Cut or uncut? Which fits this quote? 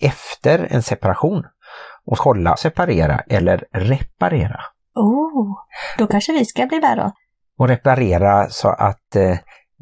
cut